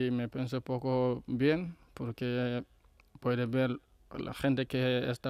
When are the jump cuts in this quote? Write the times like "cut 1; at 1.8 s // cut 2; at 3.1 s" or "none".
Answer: none